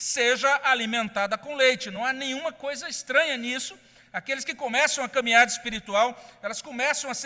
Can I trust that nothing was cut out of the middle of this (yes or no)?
yes